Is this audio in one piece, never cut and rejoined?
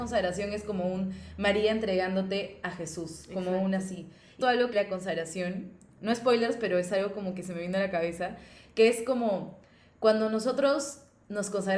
no; 2 cuts; at 4.4 s, 4.7 s

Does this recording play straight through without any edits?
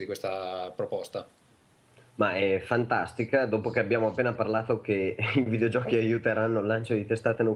yes; 0 cuts

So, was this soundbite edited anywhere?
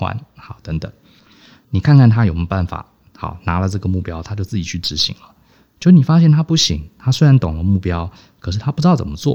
no; 0 cuts

